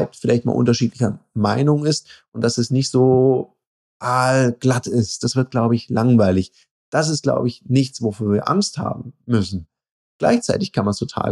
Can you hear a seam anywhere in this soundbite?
no; 0 cuts

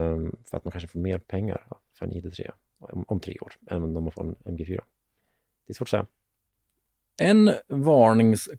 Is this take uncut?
yes; 0 cuts

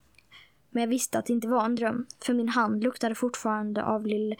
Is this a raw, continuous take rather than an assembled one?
yes; 0 cuts

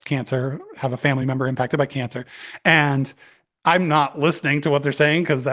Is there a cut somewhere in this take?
no; 0 cuts

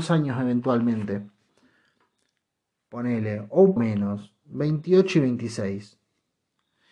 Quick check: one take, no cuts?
no; 1 cut; at 3.8 s

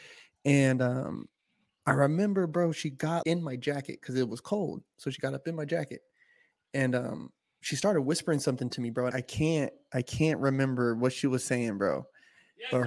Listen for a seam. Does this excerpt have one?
yes; 2 cuts; at 3.2 s, 9.1 s

